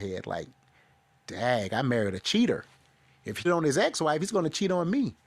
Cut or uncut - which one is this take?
cut